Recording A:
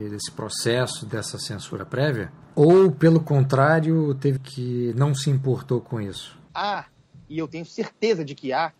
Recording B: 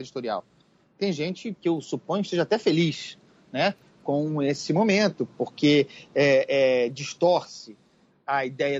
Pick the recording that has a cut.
A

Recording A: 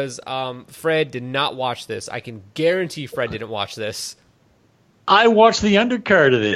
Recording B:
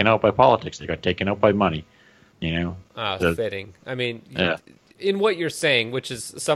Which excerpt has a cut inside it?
B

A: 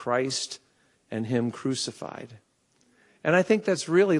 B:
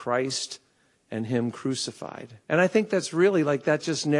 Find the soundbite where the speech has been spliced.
B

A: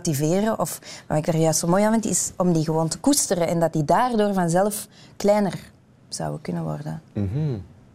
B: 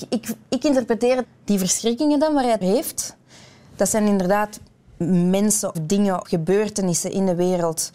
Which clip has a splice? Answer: B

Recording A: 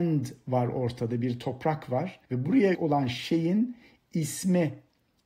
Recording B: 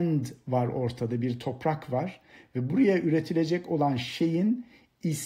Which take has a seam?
A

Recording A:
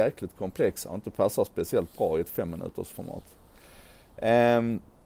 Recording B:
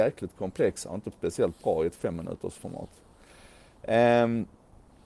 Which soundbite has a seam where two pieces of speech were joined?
B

